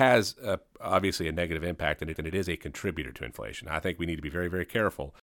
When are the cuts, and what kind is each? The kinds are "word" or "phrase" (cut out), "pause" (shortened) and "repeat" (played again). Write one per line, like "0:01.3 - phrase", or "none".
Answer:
0:02.1 - repeat